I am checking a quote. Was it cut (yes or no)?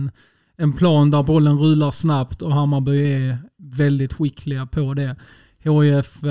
no